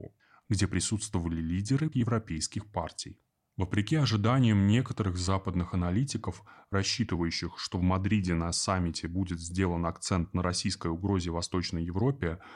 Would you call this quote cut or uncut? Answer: cut